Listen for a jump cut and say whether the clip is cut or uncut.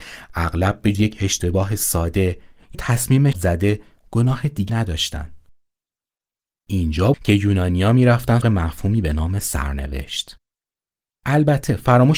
cut